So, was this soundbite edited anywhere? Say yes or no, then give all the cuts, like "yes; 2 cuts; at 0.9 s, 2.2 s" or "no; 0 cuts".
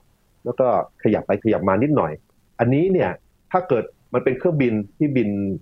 no; 0 cuts